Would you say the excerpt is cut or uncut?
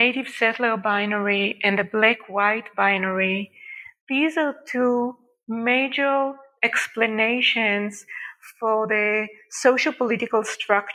uncut